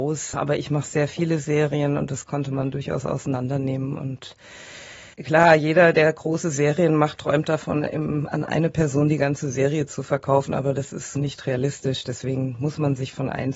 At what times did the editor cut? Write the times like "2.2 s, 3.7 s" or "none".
5.1 s